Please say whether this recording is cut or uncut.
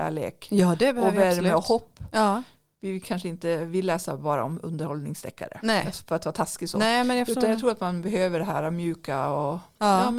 uncut